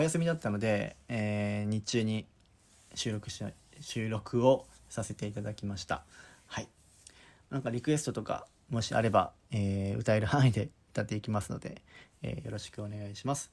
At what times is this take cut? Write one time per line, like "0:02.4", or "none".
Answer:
none